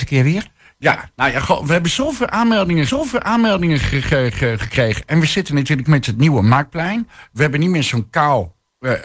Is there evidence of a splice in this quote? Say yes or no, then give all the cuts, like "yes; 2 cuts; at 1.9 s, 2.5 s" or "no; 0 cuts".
yes; 2 cuts; at 2.9 s, 5.9 s